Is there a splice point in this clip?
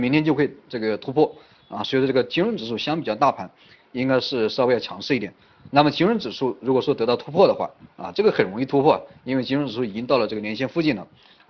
no; 0 cuts

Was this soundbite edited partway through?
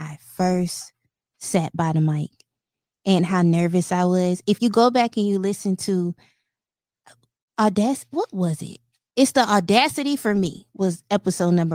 no; 0 cuts

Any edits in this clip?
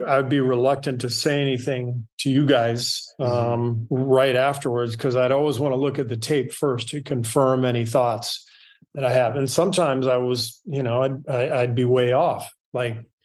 no; 0 cuts

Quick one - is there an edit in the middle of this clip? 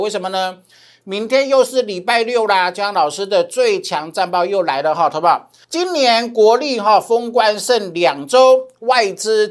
yes; 1 cut; at 5.6 s

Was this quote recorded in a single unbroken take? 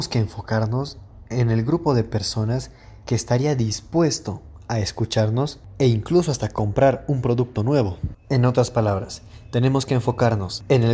yes; 0 cuts

